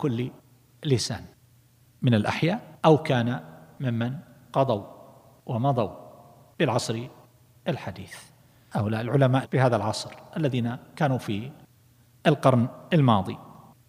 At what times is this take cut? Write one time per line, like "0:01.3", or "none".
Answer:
0:02.8
0:09.4